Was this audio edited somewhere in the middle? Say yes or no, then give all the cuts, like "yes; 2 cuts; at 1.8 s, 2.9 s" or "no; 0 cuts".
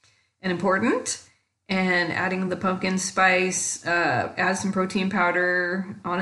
no; 0 cuts